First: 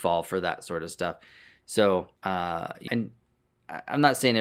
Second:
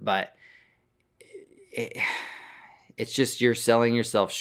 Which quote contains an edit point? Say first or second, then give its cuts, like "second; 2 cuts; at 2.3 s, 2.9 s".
first; 2 cuts; at 2.2 s, 2.9 s